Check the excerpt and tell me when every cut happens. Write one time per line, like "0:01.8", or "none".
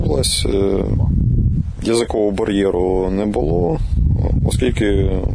none